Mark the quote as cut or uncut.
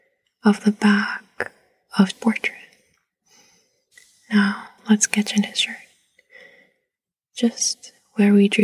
cut